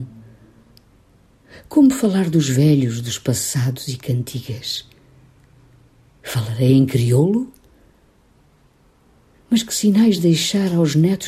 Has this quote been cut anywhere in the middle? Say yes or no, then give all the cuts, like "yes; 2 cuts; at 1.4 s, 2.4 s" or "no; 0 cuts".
no; 0 cuts